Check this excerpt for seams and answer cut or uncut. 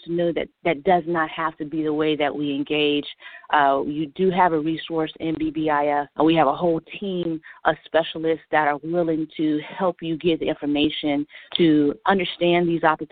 cut